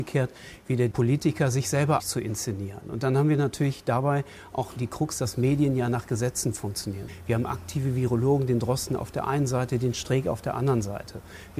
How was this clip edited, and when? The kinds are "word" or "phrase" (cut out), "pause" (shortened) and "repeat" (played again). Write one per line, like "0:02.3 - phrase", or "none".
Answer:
0:00.9 - phrase
0:02.0 - word
0:04.8 - word